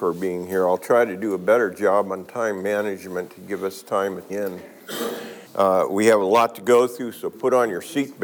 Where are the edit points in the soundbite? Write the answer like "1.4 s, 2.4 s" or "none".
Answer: 4.3 s, 5.5 s